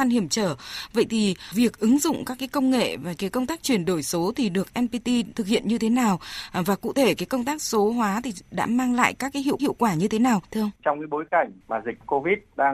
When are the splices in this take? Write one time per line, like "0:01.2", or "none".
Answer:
0:09.6
0:10.8
0:11.6